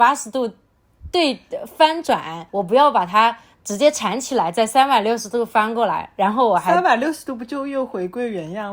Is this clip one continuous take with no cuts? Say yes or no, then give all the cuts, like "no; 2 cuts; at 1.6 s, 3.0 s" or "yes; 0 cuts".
no; 1 cut; at 2.5 s